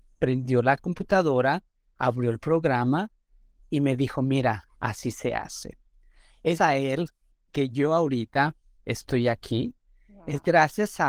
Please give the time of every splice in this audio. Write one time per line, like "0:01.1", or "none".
0:04.7
0:06.6